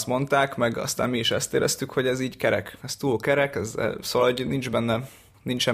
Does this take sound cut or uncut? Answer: uncut